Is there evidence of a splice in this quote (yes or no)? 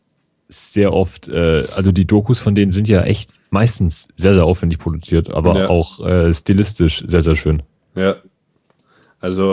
no